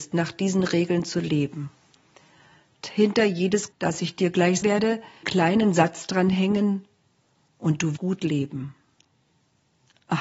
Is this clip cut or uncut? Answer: cut